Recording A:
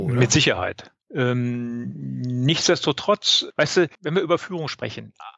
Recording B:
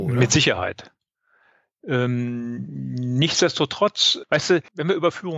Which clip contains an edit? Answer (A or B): A